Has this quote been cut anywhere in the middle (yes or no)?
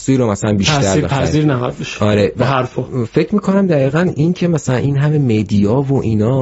no